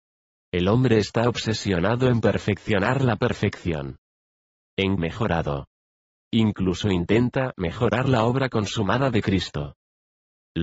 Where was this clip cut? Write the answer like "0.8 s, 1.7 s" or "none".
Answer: 5.0 s